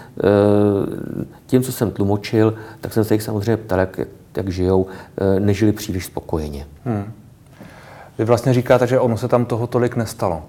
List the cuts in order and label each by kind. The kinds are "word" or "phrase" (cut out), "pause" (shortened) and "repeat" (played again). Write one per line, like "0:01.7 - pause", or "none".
0:06.8 - pause